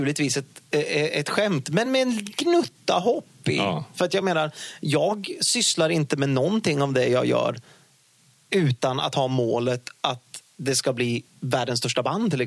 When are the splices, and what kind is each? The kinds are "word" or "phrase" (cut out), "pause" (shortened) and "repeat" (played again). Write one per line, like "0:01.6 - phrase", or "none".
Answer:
none